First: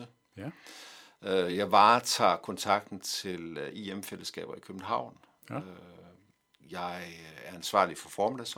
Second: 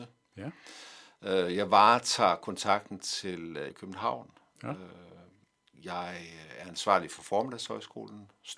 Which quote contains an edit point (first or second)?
second